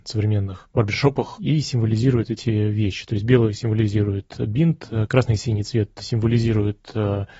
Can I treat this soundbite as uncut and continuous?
yes; 0 cuts

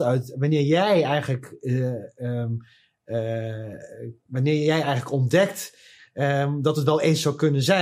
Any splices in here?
yes; 1 cut; at 4.2 s

